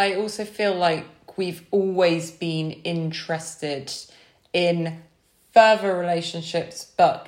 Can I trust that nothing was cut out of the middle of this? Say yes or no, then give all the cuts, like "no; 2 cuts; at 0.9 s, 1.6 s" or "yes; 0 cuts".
yes; 0 cuts